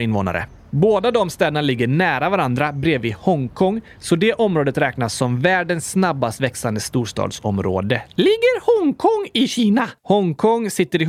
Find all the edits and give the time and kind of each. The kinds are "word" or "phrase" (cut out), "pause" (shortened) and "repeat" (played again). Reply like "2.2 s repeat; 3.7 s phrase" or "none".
10.0 s pause